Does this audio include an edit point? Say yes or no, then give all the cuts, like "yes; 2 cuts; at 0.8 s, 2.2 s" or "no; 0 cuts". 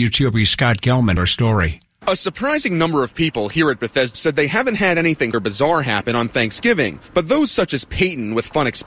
yes; 3 cuts; at 1.2 s, 4.1 s, 5.3 s